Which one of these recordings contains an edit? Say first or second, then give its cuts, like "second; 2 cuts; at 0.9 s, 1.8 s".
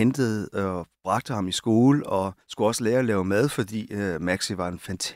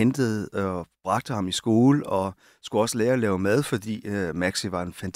first; 1 cut; at 2.4 s